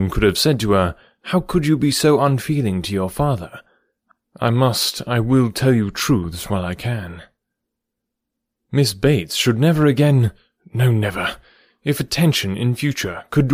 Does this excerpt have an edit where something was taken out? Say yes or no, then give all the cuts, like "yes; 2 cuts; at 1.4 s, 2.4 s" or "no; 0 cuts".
no; 0 cuts